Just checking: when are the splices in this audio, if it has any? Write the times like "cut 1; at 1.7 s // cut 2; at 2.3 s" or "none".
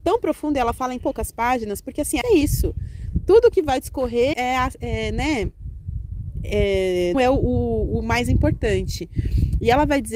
cut 1; at 1.0 s // cut 2; at 2.2 s // cut 3; at 4.3 s // cut 4; at 7.1 s